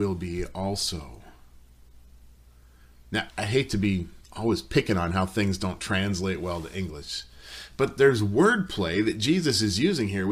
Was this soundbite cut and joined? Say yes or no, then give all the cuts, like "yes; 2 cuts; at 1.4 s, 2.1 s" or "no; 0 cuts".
yes; 2 cuts; at 3.3 s, 4.2 s